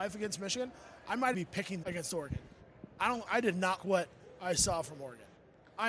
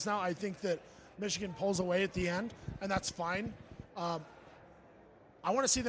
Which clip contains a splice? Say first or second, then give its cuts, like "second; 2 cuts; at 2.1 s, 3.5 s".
first; 4 cuts; at 1.3 s, 1.8 s, 3.3 s, 3.8 s